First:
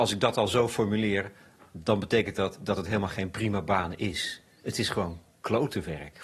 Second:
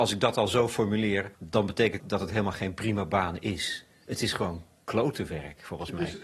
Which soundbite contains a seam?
second; 2 cuts; at 1.3 s, 2.0 s

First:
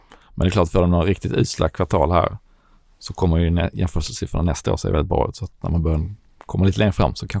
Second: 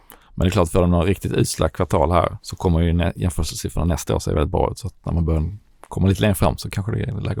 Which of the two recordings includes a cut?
second; 1 cut; at 2.4 s

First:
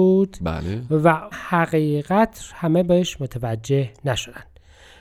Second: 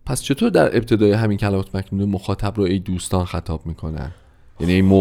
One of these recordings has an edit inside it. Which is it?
first; 1 cut; at 1.3 s

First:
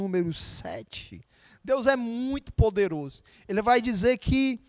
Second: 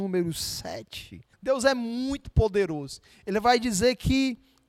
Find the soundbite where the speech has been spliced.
second; 1 cut; at 1.3 s

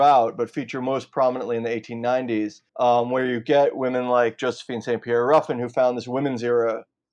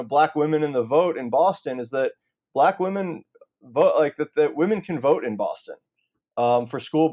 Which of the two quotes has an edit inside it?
first; 1 cut; at 2.7 s

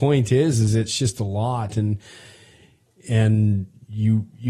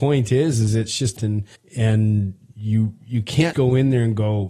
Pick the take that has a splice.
second; 3 cuts; at 1.2 s, 1.6 s, 3.5 s

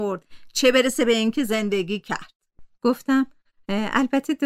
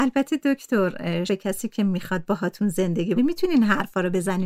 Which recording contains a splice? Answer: second; 2 cuts; at 1.3 s, 3.2 s

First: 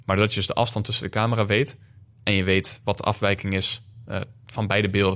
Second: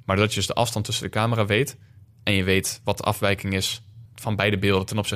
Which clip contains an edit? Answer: second; 1 cut; at 4.0 s

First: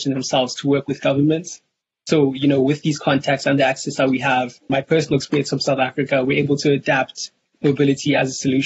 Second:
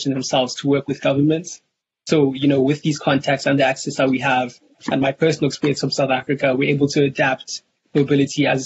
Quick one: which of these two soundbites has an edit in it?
first; 1 cut; at 4.7 s

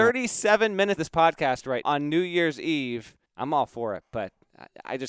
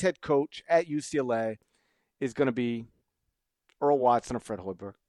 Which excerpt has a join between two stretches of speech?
first; 3 cuts; at 1.0 s, 1.8 s, 3.3 s

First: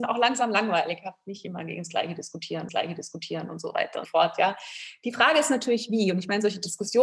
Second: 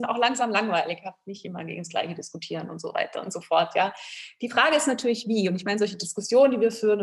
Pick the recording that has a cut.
first; 2 cuts; at 2.7 s, 4.0 s

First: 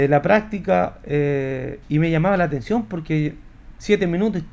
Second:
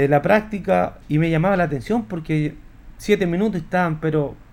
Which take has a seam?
second; 1 cut; at 1.0 s

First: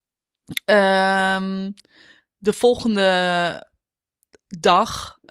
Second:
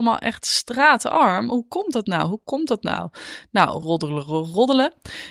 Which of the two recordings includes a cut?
second; 1 cut; at 3.8 s

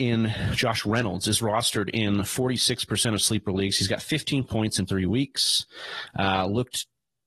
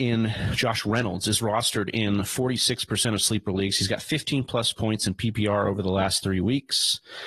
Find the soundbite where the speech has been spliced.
first; 2 cuts; at 4.5 s, 4.9 s

